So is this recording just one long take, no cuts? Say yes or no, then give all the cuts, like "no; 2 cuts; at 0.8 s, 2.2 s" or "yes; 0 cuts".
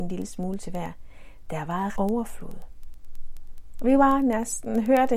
no; 1 cut; at 2.0 s